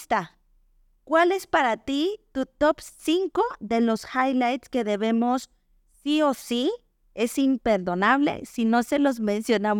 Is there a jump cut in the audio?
no; 0 cuts

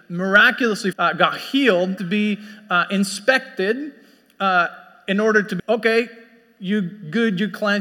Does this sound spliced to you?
yes; 3 cuts; at 0.9 s, 2.0 s, 5.6 s

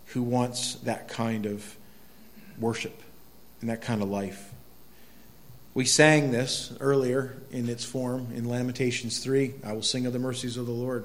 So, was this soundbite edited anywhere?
no; 0 cuts

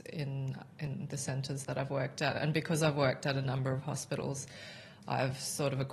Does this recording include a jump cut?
no; 0 cuts

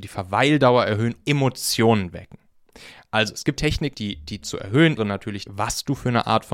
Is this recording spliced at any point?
yes; 6 cuts; at 1.2 s, 3.6 s, 3.9 s, 4.4 s, 5.0 s, 5.5 s

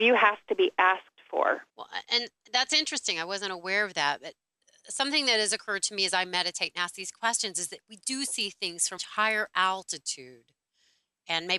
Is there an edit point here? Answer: yes; 2 cuts; at 1.7 s, 9.0 s

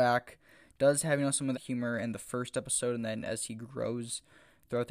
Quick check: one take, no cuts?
no; 1 cut; at 1.5 s

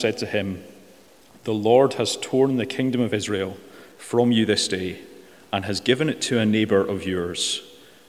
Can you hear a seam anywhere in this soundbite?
no; 0 cuts

